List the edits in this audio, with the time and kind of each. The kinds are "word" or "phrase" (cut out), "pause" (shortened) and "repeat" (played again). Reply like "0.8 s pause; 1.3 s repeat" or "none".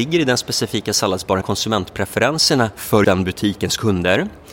1.4 s word; 3.0 s word